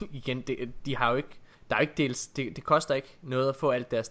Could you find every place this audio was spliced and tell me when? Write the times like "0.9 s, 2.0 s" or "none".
1.5 s